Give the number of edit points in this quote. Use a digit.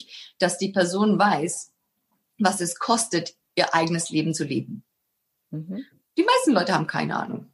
0